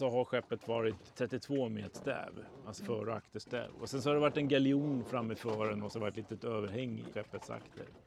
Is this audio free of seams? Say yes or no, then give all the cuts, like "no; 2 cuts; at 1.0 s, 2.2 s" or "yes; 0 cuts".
no; 5 cuts; at 1.1 s, 1.9 s, 2.8 s, 5.9 s, 7.1 s